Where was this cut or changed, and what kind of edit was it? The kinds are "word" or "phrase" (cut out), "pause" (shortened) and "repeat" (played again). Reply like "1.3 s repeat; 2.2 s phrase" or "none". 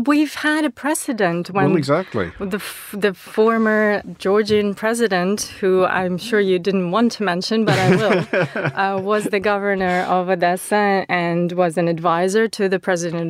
none